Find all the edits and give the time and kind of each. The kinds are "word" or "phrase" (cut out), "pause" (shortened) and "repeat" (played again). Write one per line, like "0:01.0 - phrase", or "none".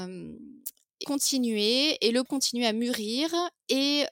0:01.0 - word
0:02.3 - word